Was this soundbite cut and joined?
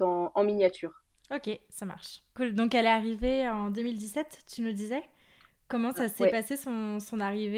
no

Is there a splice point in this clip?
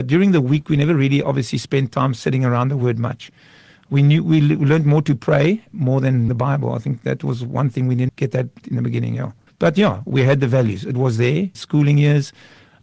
yes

